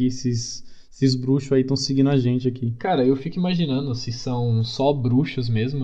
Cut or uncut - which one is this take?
uncut